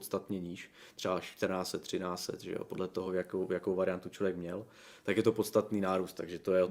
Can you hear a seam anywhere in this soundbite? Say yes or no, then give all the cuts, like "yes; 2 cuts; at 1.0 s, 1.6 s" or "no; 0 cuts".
no; 0 cuts